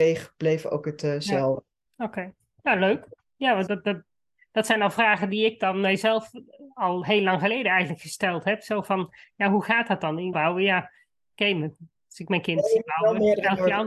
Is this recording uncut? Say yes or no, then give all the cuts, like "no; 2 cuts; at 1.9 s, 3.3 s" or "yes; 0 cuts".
no; 2 cuts; at 3.7 s, 10.3 s